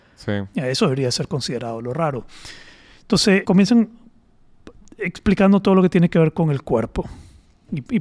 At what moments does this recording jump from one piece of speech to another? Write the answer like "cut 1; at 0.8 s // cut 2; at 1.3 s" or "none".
cut 1; at 3.4 s